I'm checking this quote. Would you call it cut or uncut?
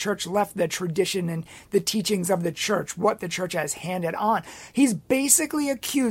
uncut